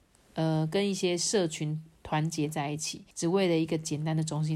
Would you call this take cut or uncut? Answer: cut